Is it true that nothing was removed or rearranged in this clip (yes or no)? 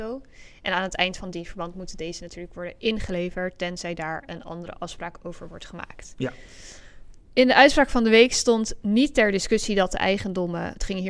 yes